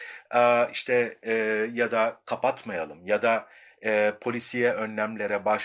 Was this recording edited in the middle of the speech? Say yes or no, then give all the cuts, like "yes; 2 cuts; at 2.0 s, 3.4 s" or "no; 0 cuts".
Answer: no; 0 cuts